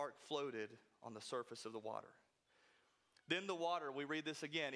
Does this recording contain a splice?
no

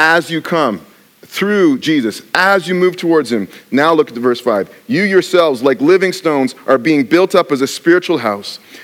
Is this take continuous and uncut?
yes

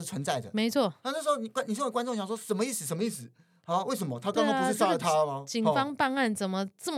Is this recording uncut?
yes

